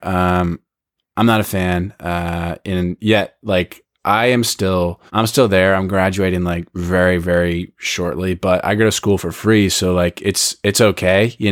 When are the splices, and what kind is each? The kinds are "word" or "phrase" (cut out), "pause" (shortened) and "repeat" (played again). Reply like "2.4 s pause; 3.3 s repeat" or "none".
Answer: 5.1 s pause